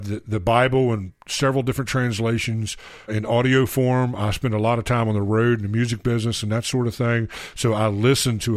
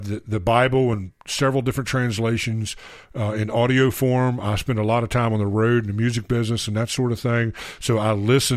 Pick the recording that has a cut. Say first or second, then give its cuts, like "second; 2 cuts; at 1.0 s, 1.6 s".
first; 1 cut; at 3.1 s